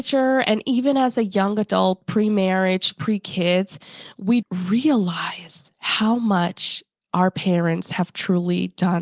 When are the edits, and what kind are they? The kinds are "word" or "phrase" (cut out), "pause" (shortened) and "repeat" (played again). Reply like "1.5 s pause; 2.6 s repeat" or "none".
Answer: 4.4 s word